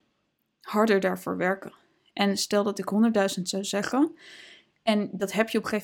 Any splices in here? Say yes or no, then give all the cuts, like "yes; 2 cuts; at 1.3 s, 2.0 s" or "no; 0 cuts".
no; 0 cuts